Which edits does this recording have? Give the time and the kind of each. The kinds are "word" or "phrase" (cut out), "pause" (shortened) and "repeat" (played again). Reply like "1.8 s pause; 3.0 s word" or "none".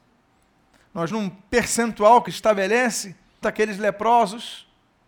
1.1 s word; 2.3 s word; 3.4 s word